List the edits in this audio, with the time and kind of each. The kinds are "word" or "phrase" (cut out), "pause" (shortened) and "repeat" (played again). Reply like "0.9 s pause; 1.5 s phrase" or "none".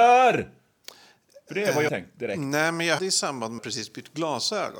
1.9 s word; 3.0 s word; 3.6 s word